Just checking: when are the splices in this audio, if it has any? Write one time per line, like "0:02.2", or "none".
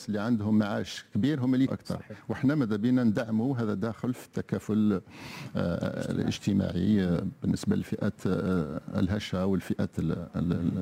0:01.7